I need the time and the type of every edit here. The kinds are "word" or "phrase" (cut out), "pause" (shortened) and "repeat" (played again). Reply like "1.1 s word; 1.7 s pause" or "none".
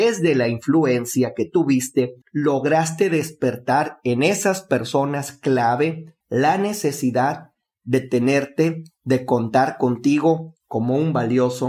2.2 s pause; 6.2 s pause